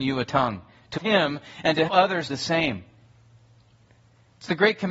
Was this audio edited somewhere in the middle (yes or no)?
yes